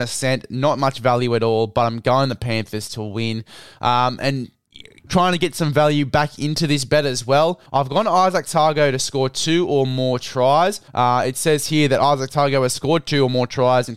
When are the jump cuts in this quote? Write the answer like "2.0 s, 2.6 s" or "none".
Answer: 5.1 s, 7.7 s, 10.9 s